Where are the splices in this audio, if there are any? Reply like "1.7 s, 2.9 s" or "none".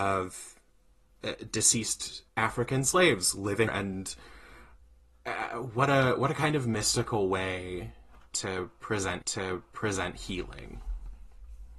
2.3 s, 3.7 s, 9.2 s